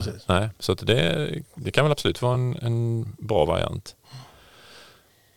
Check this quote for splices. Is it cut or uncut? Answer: uncut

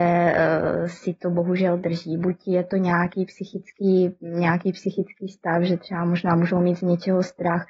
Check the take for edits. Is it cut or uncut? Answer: uncut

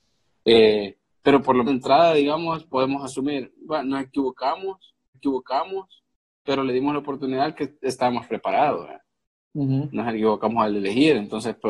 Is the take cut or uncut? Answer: cut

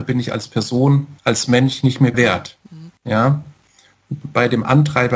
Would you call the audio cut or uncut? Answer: cut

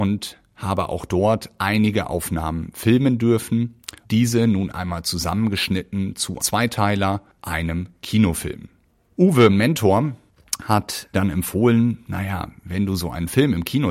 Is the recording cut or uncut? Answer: cut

